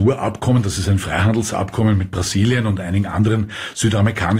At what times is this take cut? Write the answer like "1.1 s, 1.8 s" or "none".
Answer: none